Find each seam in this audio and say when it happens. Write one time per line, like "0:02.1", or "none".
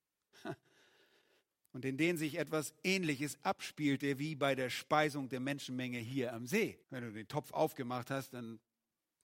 0:06.8